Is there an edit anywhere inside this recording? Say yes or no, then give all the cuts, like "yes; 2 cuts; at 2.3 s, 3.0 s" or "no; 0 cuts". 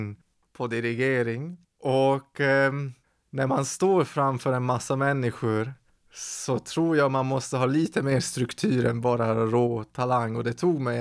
no; 0 cuts